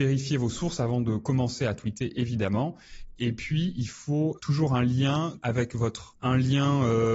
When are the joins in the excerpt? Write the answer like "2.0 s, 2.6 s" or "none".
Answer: 6.2 s